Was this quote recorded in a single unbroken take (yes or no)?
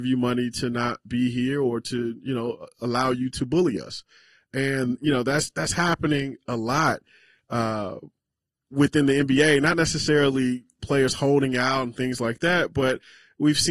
yes